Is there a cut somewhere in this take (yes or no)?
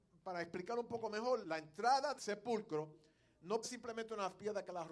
yes